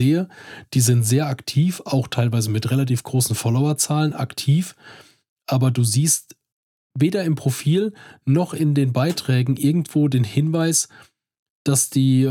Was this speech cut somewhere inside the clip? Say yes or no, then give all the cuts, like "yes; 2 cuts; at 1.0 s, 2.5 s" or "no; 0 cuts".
no; 0 cuts